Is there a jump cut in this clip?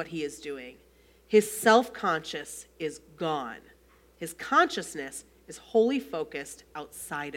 no; 0 cuts

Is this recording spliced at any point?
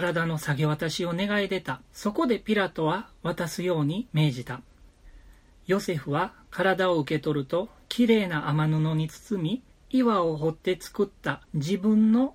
yes; 4 cuts; at 1.9 s, 4.1 s, 9.7 s, 11.4 s

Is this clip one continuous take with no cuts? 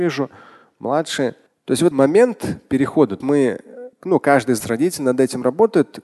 no; 5 cuts; at 1.5 s, 1.9 s, 3.2 s, 3.9 s, 4.6 s

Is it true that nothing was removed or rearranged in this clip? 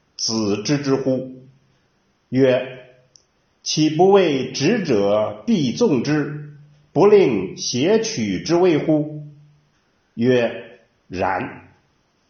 yes; 0 cuts

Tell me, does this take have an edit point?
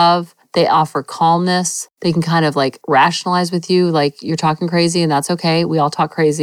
no; 0 cuts

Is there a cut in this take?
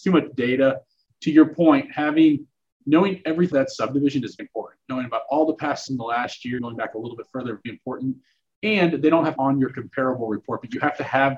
yes; 6 cuts; at 3.5 s, 4.4 s, 5.9 s, 6.6 s, 7.6 s, 9.4 s

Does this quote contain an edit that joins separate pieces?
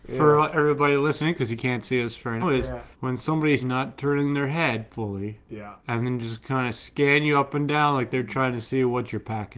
yes; 4 cuts; at 2.4 s, 2.9 s, 3.6 s, 5.8 s

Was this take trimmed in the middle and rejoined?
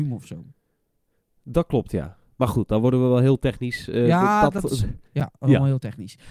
yes; 1 cut; at 5.1 s

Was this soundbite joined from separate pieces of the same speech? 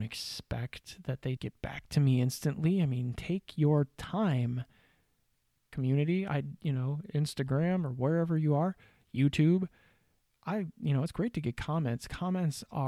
yes; 1 cut; at 1.4 s

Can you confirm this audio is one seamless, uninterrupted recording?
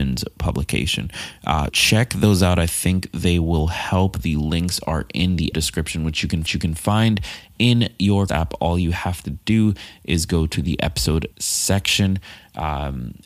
no; 5 cuts; at 1.7 s, 5.5 s, 6.5 s, 8.3 s, 11.3 s

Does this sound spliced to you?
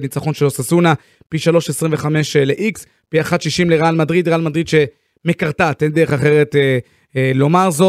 no; 0 cuts

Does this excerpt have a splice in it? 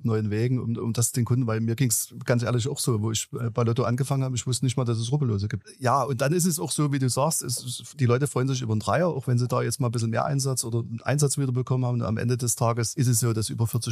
no; 0 cuts

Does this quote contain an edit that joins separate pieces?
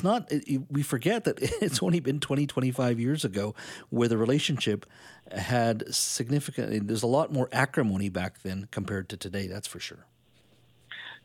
no; 0 cuts

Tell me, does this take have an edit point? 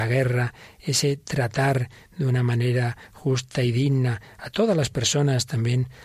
no; 0 cuts

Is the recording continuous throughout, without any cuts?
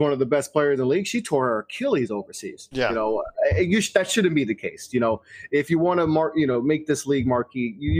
yes; 0 cuts

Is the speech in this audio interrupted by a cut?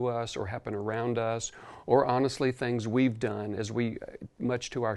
no; 0 cuts

